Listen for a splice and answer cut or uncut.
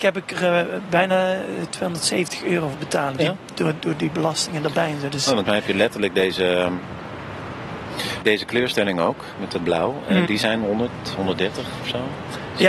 cut